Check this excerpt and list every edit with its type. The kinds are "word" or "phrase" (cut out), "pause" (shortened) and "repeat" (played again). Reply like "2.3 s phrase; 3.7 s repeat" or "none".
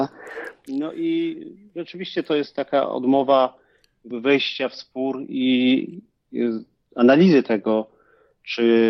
none